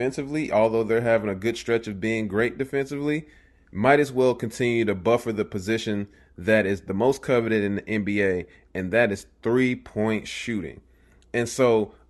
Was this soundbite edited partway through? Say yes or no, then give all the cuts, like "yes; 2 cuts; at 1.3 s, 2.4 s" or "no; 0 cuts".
no; 0 cuts